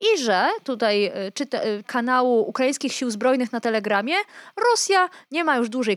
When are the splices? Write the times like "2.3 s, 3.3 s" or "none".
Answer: 1.8 s